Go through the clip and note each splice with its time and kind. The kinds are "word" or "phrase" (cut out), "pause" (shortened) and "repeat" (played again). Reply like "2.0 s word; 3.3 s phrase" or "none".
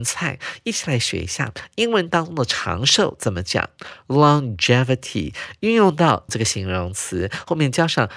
6.3 s word